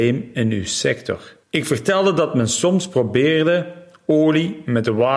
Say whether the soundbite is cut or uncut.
cut